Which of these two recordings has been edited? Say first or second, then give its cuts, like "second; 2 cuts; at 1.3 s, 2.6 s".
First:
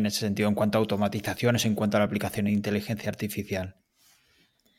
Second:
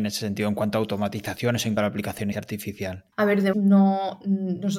second; 4 cuts; at 1.8 s, 2.3 s, 3.1 s, 3.5 s